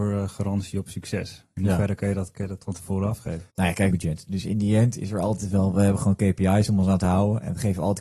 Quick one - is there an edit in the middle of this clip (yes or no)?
yes